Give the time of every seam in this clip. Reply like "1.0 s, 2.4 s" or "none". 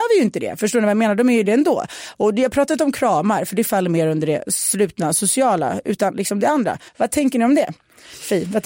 6.9 s